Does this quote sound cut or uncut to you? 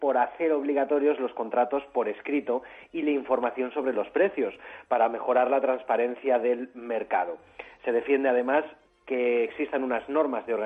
uncut